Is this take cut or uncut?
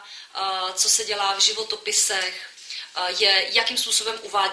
uncut